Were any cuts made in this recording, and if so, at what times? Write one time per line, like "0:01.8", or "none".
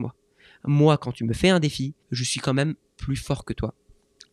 0:02.0